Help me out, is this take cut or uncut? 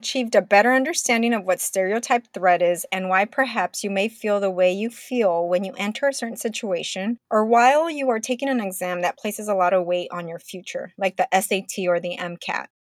uncut